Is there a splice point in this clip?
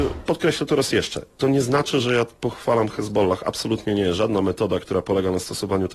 no; 0 cuts

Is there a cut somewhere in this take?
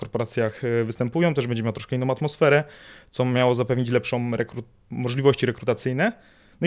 yes; 1 cut; at 4.8 s

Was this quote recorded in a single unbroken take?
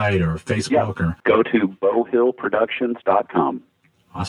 yes; 0 cuts

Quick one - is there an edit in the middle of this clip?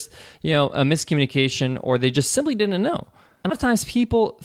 yes; 1 cut; at 3.5 s

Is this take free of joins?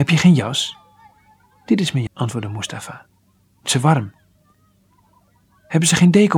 no; 2 cuts; at 2.1 s, 3.7 s

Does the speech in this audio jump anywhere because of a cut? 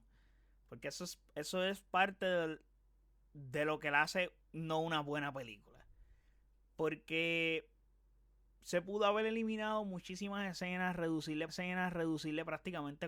yes; 1 cut; at 11.5 s

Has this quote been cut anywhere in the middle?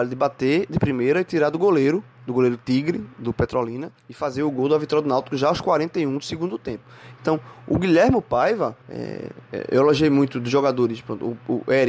yes; 2 cuts; at 4.0 s, 8.8 s

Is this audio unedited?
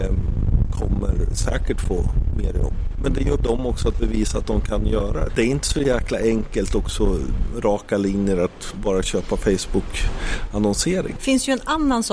no; 2 cuts; at 3.4 s, 5.3 s

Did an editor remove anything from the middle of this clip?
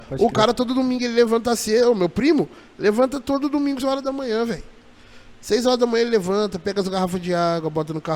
yes; 1 cut; at 3.8 s

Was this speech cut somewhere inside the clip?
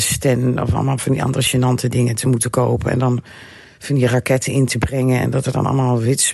no; 0 cuts

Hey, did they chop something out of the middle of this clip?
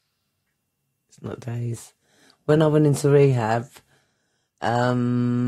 no; 0 cuts

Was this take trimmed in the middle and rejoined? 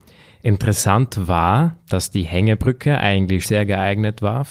yes; 2 cuts; at 1.8 s, 3.4 s

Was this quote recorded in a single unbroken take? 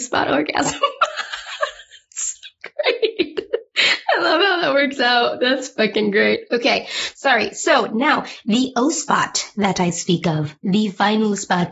yes; 0 cuts

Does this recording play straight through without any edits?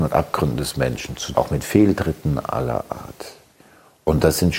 no; 1 cut; at 1.4 s

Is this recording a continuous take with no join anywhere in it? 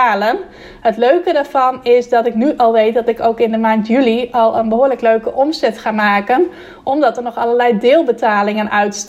yes; 0 cuts

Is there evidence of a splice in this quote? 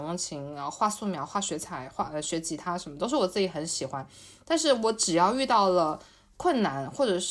no; 0 cuts

